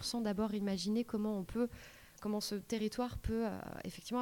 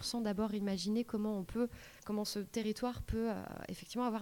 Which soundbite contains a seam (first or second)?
second